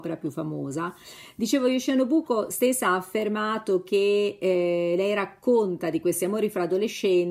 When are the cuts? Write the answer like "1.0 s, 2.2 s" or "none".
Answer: none